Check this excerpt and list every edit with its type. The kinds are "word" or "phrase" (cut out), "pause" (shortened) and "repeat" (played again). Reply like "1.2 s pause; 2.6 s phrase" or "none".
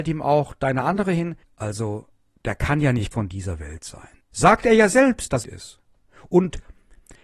1.4 s pause; 3.1 s word; 4.2 s pause; 5.4 s phrase